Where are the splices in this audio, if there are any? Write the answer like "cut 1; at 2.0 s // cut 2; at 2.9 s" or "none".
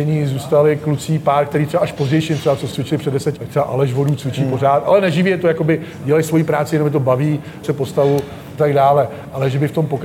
cut 1; at 2.7 s // cut 2; at 3.4 s // cut 3; at 7.6 s // cut 4; at 8.6 s

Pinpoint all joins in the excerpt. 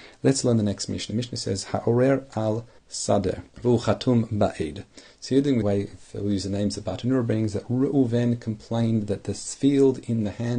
cut 1; at 3.5 s // cut 2; at 5.6 s

